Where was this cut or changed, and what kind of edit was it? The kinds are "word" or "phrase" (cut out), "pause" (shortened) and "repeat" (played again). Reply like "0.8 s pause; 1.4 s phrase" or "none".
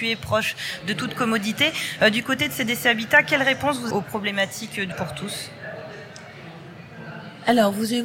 3.9 s phrase; 4.9 s word